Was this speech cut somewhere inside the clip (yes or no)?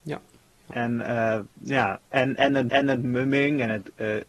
yes